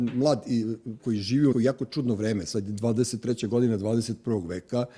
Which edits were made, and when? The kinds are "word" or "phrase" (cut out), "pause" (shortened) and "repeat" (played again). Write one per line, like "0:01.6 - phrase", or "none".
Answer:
0:01.0 - word
0:01.5 - word

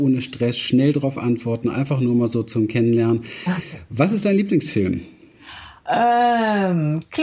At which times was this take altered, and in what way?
none

